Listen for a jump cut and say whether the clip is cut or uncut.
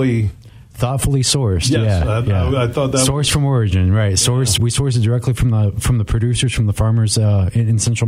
cut